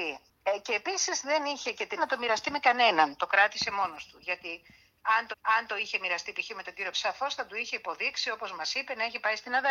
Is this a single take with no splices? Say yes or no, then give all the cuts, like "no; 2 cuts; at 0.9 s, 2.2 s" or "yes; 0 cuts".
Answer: no; 3 cuts; at 2.0 s, 5.3 s, 6.9 s